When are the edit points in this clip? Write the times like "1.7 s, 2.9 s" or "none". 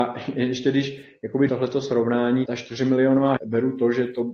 1.5 s, 2.5 s, 3.4 s